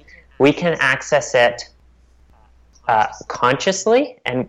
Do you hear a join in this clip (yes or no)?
no